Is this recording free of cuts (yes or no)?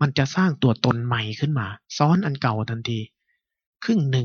no